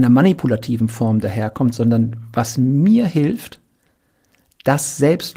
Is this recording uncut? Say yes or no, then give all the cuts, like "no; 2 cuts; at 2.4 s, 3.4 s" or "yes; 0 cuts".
yes; 0 cuts